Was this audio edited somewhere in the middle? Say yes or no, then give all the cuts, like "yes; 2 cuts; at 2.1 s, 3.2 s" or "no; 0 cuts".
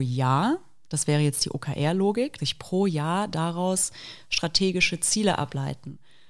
yes; 1 cut; at 2.4 s